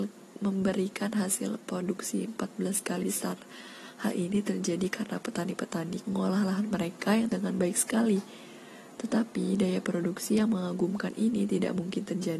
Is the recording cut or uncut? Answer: cut